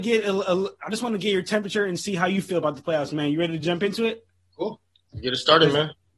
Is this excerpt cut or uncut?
uncut